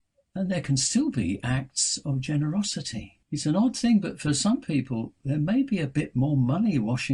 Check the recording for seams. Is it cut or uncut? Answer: cut